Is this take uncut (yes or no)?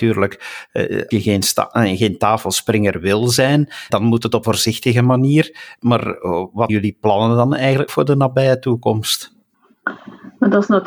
no